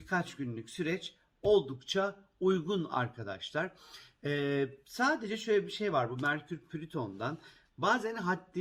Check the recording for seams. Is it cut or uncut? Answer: uncut